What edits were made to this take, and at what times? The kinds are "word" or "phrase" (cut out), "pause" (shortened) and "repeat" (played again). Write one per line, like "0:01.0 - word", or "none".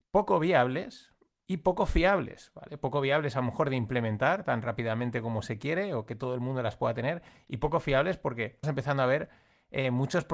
0:08.6 - word